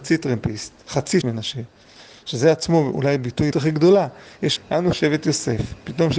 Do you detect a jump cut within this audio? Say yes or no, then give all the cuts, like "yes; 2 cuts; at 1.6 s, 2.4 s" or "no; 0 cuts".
yes; 3 cuts; at 1.2 s, 3.5 s, 4.6 s